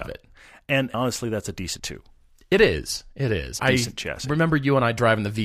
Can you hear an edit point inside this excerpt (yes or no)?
yes